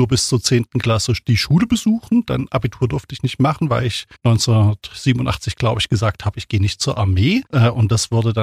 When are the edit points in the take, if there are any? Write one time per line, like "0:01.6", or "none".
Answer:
0:04.2
0:07.5